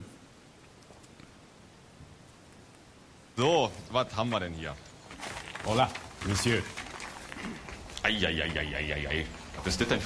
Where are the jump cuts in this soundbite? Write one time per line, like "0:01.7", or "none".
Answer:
none